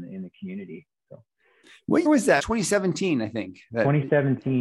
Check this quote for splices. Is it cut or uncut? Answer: cut